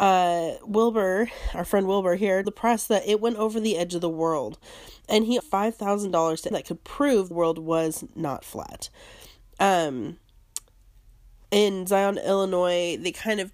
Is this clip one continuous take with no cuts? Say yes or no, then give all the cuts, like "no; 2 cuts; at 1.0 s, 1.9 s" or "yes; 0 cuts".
no; 4 cuts; at 2.4 s, 5.4 s, 6.5 s, 7.3 s